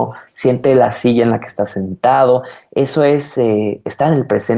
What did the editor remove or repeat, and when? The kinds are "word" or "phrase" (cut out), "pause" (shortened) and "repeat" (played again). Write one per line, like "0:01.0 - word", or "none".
none